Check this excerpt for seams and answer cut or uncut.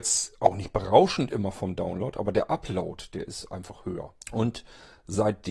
cut